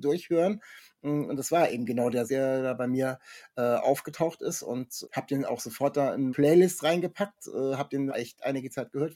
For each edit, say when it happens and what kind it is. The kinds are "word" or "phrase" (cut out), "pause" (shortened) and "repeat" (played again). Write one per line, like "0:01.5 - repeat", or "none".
0:02.3 - word
0:05.0 - word
0:06.3 - word
0:08.1 - phrase